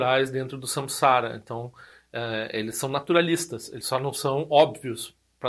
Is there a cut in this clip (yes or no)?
no